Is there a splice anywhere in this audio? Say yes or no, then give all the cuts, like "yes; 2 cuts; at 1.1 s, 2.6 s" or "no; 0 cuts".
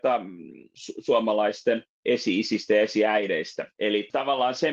yes; 2 cuts; at 1.9 s, 3.7 s